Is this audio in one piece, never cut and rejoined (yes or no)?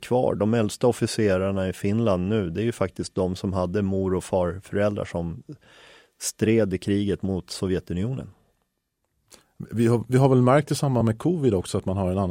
yes